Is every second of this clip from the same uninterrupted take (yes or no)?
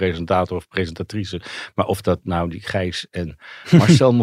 yes